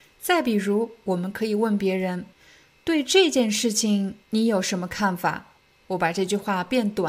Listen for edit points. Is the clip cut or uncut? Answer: cut